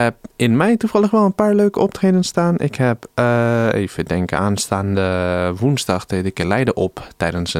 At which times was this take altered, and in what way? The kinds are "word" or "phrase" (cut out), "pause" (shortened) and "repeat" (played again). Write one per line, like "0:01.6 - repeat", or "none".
none

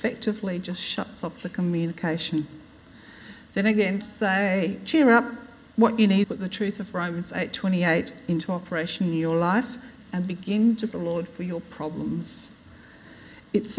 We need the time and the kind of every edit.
0:04.0 - word
0:06.2 - word
0:10.9 - word

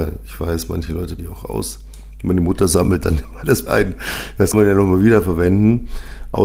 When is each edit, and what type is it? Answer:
0:01.2 - word
0:03.7 - word
0:04.5 - word

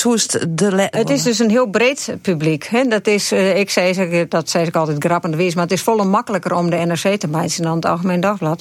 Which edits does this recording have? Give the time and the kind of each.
0:00.9 - phrase

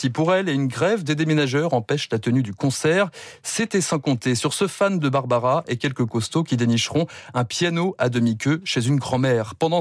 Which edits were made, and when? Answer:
none

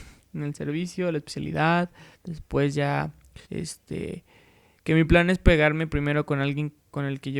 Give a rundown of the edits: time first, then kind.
0:02.1 - pause
0:03.4 - pause

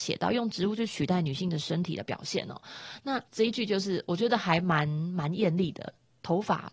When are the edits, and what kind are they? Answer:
0:03.3 - pause

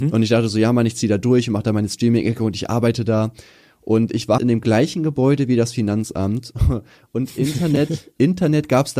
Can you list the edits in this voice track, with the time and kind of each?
0:04.4 - word

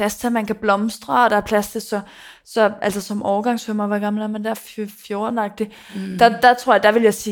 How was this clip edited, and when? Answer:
none

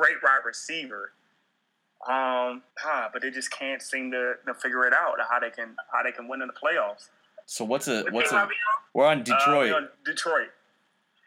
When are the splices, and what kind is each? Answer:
0:02.7 - pause
0:07.4 - pause
0:08.9 - pause
0:09.9 - pause

